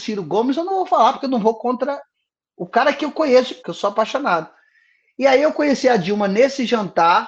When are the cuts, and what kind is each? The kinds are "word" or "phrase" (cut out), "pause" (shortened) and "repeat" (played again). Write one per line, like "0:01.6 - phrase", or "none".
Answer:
0:03.6 - phrase